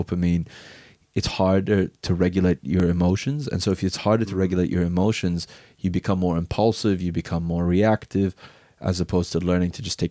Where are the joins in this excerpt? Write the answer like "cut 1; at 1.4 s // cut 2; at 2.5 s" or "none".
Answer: none